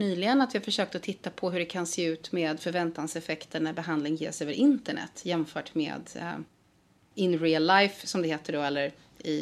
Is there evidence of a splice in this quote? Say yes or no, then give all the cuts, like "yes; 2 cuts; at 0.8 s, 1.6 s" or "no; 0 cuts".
no; 0 cuts